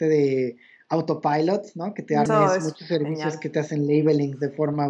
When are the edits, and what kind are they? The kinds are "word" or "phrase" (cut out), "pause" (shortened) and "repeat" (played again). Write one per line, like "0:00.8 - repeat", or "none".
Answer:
0:02.3 - word